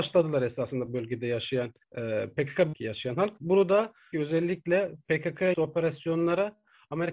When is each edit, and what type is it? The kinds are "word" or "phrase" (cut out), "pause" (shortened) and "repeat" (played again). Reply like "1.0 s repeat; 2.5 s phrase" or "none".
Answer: 1.8 s pause; 2.7 s word; 4.1 s phrase; 5.5 s word